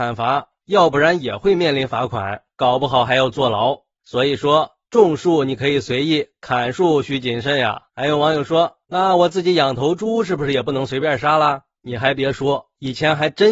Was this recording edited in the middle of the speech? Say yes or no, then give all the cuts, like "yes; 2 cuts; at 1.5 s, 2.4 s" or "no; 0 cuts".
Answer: yes; 1 cut; at 7.9 s